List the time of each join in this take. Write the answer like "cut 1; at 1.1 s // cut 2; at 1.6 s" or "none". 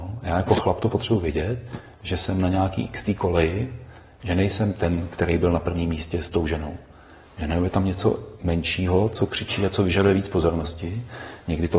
none